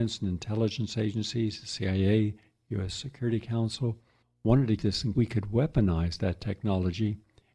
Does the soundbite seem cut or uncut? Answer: cut